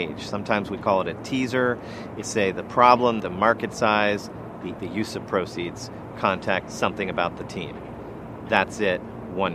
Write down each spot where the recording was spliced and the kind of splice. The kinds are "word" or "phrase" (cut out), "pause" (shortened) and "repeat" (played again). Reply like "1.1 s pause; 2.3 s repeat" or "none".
2.2 s word; 3.2 s phrase; 4.8 s word; 6.1 s word; 6.6 s word